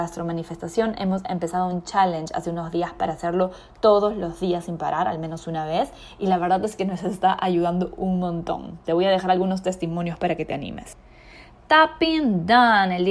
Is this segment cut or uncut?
uncut